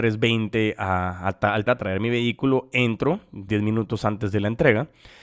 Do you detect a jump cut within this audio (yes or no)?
yes